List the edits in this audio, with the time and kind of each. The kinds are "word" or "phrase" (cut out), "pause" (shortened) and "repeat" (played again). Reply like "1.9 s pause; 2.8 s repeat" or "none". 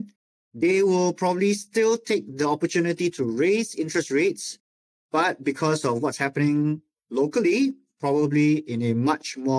none